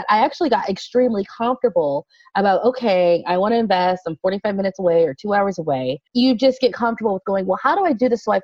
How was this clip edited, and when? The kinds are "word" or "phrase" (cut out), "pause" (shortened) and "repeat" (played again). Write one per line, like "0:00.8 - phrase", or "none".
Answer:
0:06.1 - pause
0:06.7 - word